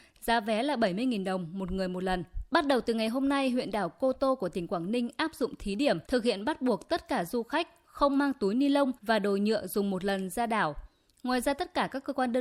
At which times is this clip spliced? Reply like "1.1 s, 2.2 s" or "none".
2.5 s, 6.1 s, 9.0 s